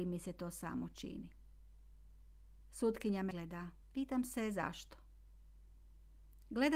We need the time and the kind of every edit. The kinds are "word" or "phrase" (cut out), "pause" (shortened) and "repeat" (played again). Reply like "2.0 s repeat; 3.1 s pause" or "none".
2.6 s pause; 3.3 s word; 3.8 s pause